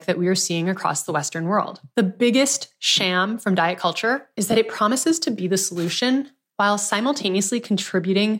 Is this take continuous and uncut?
no; 2 cuts; at 1.9 s, 4.3 s

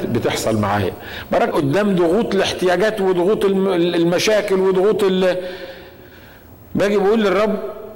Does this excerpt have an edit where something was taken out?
yes; 1 cut; at 1.5 s

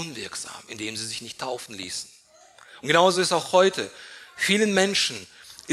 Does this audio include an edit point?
no; 0 cuts

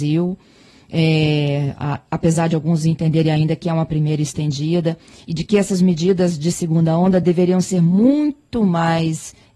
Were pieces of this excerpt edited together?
no; 0 cuts

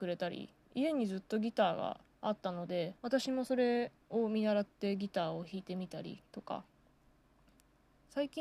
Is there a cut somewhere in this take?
yes; 4 cuts; at 2.1 s, 3.0 s, 4.0 s, 6.3 s

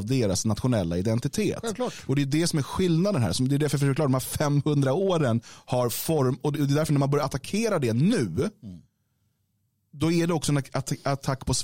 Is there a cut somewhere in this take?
no; 0 cuts

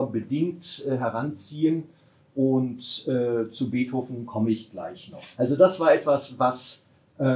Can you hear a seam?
no; 0 cuts

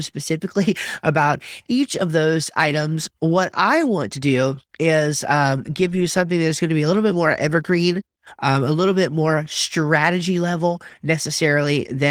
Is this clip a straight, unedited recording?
no; 1 cut; at 4.7 s

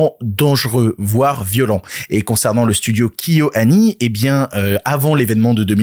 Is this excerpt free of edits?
yes; 0 cuts

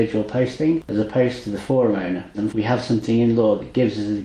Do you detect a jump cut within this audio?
yes; 1 cut; at 2.5 s

